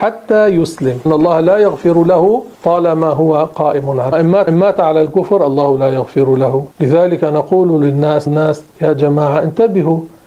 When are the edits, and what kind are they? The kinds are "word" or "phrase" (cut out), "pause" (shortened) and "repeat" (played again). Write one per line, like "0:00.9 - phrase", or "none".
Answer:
0:01.1 - word
0:02.5 - pause
0:04.1 - phrase
0:04.5 - repeat
0:06.7 - pause
0:08.3 - word
0:08.7 - pause